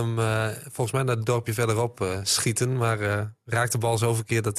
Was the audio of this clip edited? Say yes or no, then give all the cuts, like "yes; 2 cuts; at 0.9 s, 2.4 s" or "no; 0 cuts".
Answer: no; 0 cuts